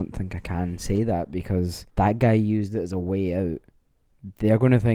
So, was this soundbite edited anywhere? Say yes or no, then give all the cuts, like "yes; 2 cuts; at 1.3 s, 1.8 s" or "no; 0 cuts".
yes; 1 cut; at 1.9 s